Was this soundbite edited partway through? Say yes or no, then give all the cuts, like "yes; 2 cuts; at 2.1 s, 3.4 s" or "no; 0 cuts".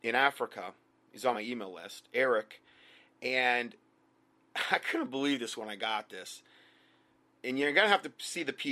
yes; 1 cut; at 1.3 s